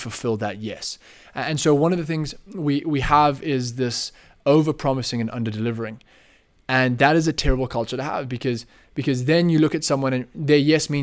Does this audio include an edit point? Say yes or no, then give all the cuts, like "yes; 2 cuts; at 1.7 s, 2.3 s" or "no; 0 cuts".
no; 0 cuts